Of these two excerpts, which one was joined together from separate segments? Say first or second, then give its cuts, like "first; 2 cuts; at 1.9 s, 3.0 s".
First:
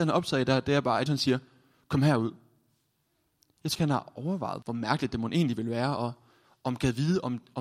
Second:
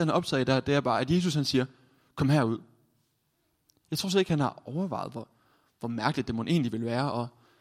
first; 3 cuts; at 1.1 s, 3.7 s, 4.6 s